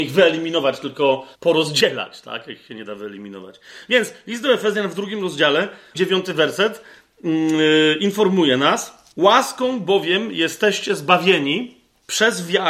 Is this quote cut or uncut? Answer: cut